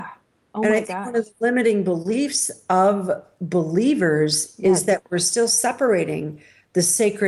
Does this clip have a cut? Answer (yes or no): no